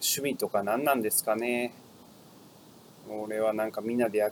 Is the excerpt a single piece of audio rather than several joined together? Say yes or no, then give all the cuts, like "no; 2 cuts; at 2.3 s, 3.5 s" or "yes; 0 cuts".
yes; 0 cuts